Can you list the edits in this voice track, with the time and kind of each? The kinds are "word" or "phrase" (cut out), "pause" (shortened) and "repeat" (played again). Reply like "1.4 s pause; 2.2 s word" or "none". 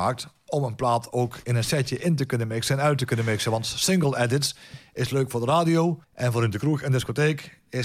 6.0 s pause